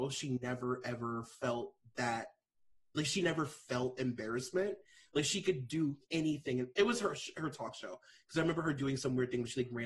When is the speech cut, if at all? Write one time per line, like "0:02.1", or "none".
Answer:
none